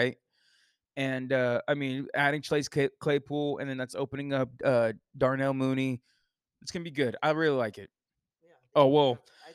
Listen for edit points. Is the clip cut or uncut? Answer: uncut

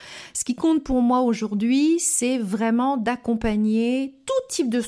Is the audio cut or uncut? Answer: uncut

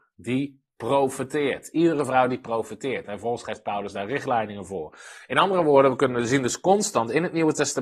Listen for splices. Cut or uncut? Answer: uncut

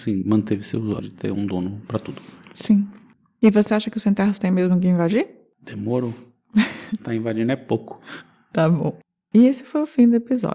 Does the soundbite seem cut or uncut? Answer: cut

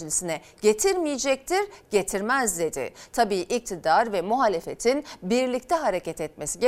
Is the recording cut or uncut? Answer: uncut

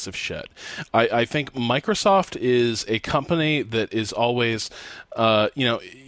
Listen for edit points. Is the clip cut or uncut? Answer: uncut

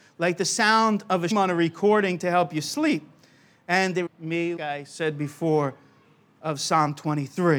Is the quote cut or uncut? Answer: cut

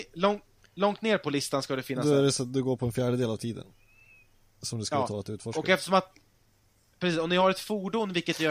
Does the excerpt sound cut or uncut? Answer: uncut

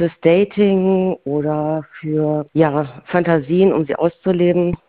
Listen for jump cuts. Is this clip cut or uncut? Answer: cut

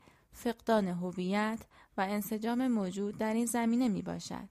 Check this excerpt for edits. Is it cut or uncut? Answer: uncut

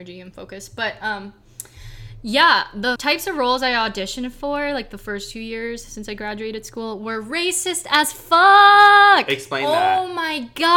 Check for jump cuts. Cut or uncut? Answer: cut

